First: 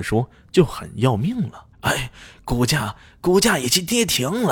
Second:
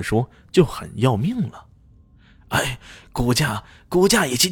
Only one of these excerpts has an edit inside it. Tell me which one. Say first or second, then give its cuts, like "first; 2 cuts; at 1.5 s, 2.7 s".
first; 1 cut; at 1.7 s